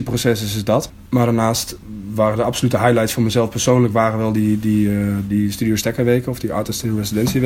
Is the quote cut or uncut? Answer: uncut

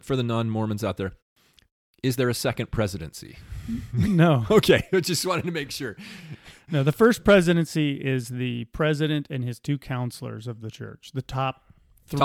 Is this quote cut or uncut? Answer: uncut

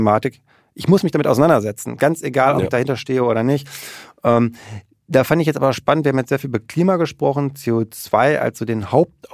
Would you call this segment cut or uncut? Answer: uncut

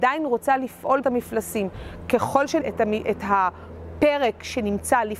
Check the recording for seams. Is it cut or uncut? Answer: cut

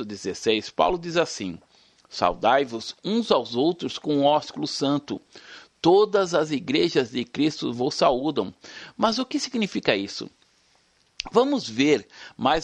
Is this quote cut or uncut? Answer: uncut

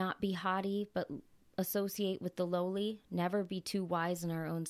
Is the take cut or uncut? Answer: uncut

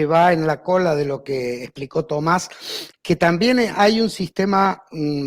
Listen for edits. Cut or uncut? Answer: cut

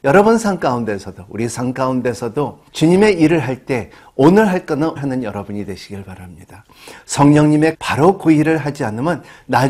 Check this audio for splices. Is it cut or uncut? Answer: cut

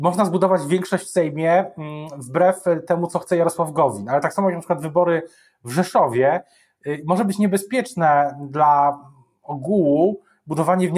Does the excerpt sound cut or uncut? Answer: uncut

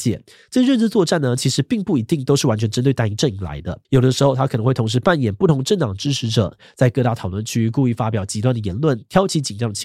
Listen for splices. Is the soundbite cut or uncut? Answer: cut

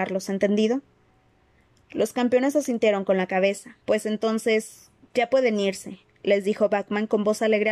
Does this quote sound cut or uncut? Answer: cut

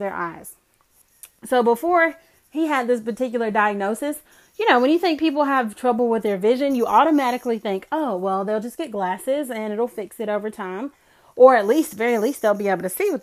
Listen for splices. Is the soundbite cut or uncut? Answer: uncut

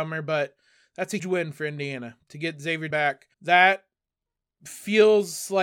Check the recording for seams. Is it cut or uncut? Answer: cut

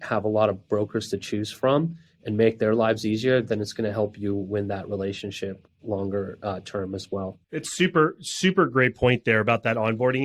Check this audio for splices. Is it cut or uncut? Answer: cut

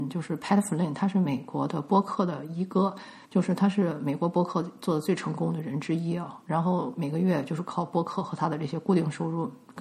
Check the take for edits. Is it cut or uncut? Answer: cut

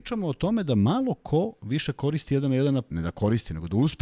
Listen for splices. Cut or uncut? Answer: cut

